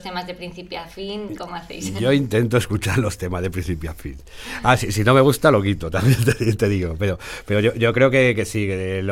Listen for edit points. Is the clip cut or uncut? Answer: uncut